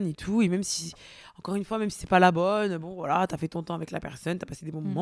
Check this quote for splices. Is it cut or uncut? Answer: uncut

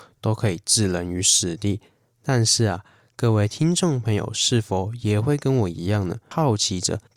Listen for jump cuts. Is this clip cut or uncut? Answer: uncut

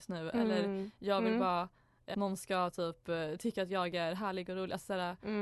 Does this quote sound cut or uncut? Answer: cut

